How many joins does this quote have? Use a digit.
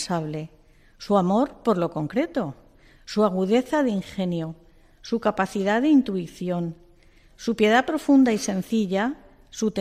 0